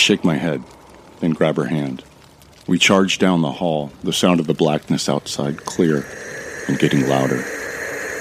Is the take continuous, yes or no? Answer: yes